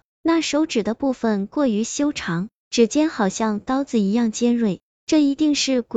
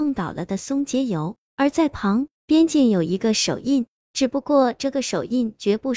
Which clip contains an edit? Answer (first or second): second